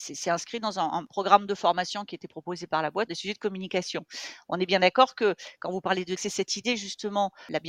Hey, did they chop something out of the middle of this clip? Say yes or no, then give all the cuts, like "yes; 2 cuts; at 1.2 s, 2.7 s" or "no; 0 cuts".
yes; 2 cuts; at 3.1 s, 6.2 s